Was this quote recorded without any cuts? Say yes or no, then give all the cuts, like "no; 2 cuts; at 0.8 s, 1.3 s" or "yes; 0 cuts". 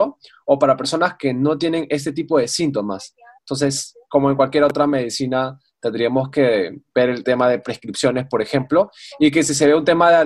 yes; 0 cuts